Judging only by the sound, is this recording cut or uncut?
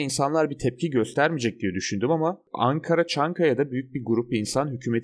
uncut